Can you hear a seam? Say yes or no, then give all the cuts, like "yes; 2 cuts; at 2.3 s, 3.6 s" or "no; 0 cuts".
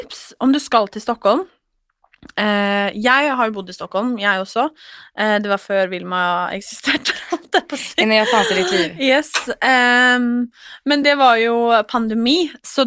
no; 0 cuts